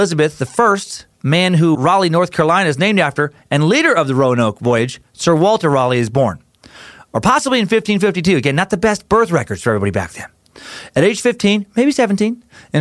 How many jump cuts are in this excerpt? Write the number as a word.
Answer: one